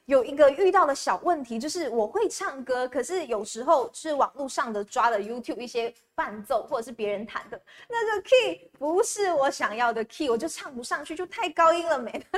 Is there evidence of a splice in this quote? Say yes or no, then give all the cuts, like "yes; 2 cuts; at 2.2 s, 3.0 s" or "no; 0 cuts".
no; 0 cuts